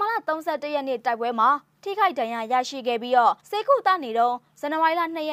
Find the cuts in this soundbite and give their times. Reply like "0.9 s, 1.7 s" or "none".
3.4 s